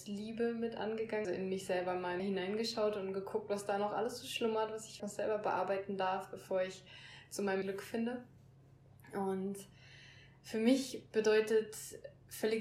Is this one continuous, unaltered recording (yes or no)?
no